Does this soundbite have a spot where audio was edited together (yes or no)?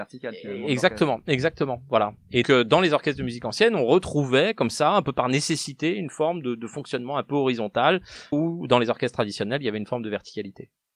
yes